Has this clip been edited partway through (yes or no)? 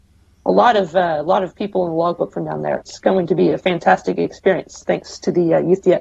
no